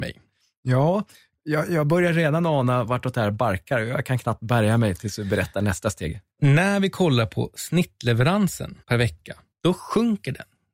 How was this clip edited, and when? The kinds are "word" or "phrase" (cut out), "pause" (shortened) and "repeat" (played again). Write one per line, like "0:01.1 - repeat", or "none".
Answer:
0:06.3 - pause
0:08.8 - pause
0:09.5 - pause